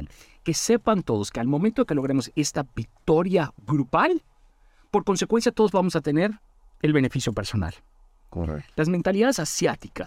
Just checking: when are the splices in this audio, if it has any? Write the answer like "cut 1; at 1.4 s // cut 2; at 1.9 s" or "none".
none